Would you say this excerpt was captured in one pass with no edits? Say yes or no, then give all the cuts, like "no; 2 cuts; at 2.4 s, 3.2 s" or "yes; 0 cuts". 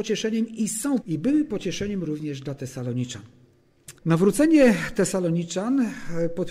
no; 2 cuts; at 1.0 s, 4.0 s